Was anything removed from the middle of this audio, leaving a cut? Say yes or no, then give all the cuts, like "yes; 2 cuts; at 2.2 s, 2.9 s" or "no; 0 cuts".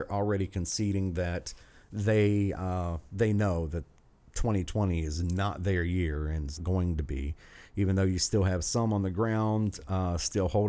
yes; 1 cut; at 6.6 s